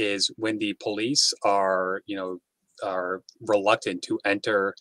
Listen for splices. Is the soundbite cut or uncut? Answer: uncut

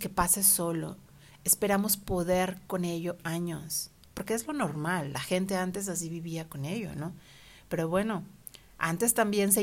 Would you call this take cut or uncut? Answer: uncut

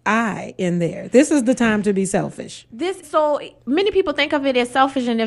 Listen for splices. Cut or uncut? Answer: cut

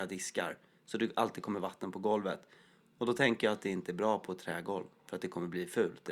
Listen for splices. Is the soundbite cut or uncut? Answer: uncut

